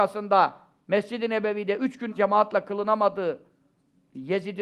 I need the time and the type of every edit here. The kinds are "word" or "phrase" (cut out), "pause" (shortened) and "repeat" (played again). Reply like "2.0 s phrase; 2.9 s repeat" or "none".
2.1 s word